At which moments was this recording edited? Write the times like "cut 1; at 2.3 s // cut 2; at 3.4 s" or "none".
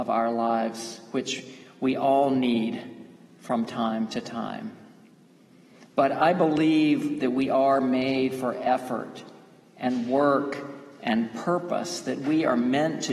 none